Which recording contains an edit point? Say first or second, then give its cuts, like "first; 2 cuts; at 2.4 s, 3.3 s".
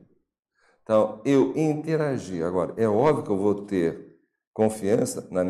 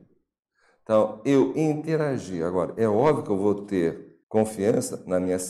second; 1 cut; at 4.2 s